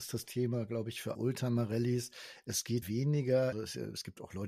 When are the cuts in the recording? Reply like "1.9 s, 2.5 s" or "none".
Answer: 1.1 s, 2.8 s, 3.5 s